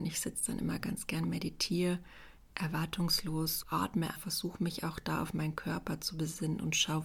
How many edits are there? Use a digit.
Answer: 2